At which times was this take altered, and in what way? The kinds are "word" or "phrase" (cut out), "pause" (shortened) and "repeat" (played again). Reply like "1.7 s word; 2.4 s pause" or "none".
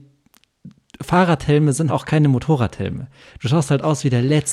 1.9 s word